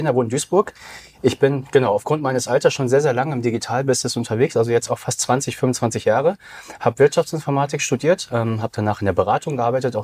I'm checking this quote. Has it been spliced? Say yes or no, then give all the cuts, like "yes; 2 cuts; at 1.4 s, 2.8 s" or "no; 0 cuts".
no; 0 cuts